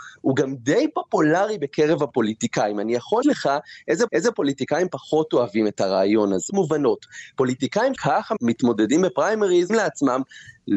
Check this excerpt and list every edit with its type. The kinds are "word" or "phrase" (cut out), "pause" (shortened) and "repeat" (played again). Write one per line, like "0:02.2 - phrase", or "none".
0:03.2 - word
0:04.1 - repeat
0:06.5 - word
0:08.0 - word
0:09.7 - word